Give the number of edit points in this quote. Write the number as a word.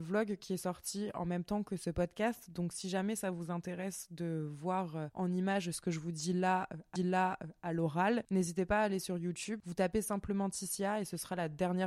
one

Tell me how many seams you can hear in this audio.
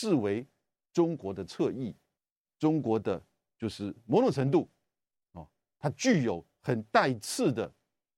one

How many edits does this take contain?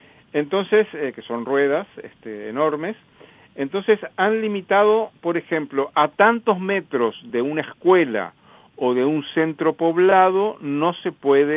zero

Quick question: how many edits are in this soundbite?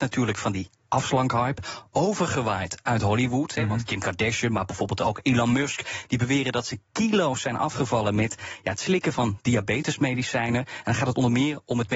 zero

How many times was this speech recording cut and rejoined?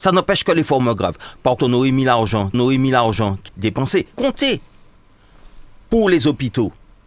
four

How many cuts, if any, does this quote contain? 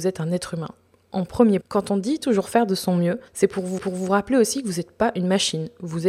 three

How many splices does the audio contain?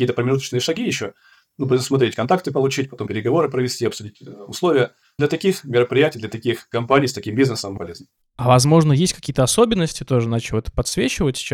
two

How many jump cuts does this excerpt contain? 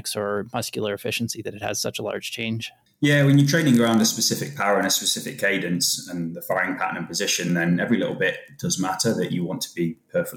zero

